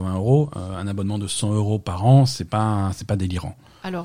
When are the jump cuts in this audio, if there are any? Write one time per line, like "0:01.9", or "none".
none

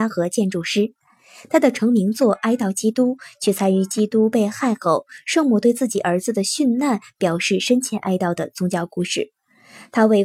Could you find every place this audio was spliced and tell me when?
none

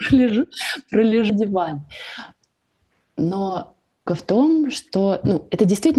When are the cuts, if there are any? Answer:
0:01.3
0:04.1

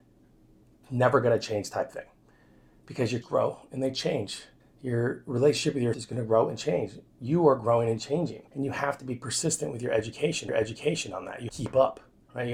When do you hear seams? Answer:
0:03.2
0:04.6
0:05.9
0:07.1
0:08.5
0:10.5
0:11.5

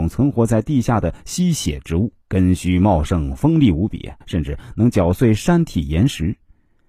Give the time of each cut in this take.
0:02.2
0:04.2

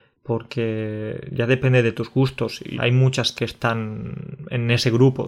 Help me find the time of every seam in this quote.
0:02.7
0:03.3

